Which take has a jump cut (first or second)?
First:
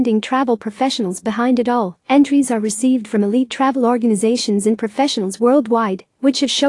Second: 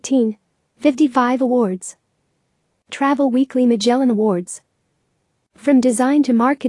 first